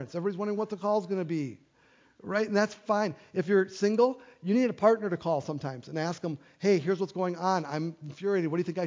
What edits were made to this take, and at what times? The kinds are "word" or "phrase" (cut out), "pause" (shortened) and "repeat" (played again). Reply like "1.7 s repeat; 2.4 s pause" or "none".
none